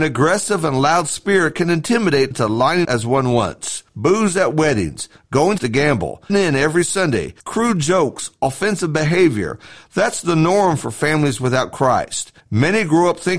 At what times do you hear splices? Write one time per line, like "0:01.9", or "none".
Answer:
0:02.3
0:02.8
0:03.9
0:05.6
0:06.3
0:07.4
0:12.4